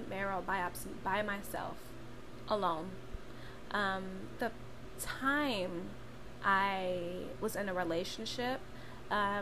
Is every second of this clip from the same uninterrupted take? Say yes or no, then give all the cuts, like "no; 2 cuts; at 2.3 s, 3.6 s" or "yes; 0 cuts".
no; 1 cut; at 4.4 s